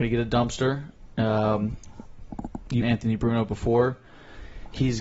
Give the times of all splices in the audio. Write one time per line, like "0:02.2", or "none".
0:02.8